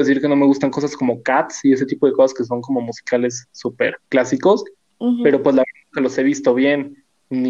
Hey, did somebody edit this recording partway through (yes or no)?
no